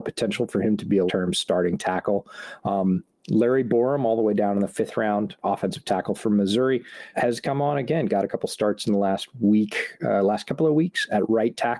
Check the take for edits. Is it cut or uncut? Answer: cut